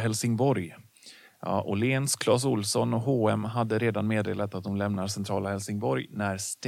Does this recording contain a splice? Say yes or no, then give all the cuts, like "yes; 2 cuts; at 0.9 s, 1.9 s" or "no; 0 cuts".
no; 0 cuts